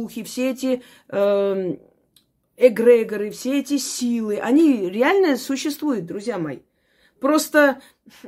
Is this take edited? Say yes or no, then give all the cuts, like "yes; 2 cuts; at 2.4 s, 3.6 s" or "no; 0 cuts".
no; 0 cuts